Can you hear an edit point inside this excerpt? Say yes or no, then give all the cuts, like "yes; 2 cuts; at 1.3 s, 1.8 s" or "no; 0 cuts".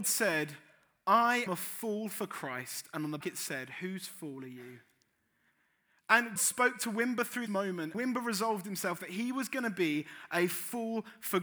yes; 5 cuts; at 1.5 s, 3.2 s, 6.4 s, 7.5 s, 7.9 s